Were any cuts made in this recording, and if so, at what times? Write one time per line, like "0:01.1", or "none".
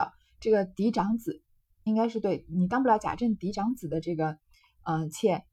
none